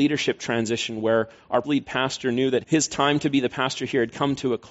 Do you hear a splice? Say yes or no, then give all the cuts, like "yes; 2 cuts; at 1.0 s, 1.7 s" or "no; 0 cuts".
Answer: yes; 2 cuts; at 1.6 s, 2.6 s